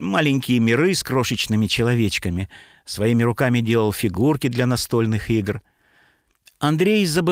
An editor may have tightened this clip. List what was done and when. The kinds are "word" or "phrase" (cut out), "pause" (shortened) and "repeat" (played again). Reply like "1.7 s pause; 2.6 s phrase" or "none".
none

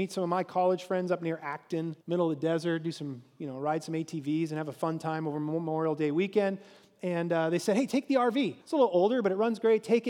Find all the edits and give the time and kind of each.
2.0 s pause; 8.6 s pause

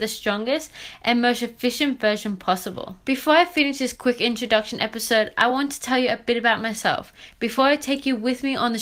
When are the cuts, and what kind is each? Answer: none

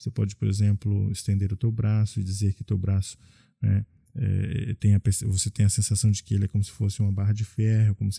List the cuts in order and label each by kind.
none

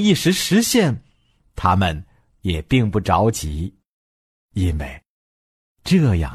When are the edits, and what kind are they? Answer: none

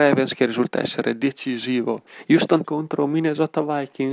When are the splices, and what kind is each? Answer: 2.6 s word

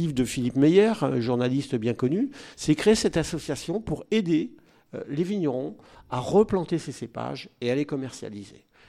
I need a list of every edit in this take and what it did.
none

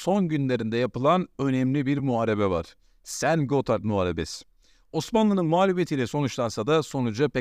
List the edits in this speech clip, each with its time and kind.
none

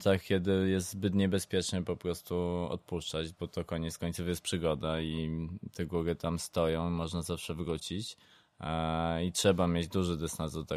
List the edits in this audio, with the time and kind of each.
none

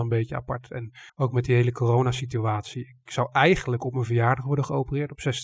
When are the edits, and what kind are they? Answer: 1.1 s pause

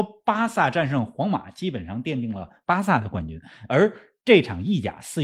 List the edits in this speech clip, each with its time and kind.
none

